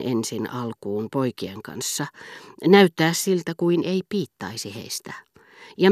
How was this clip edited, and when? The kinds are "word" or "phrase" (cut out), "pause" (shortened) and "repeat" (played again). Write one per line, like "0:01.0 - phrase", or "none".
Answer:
none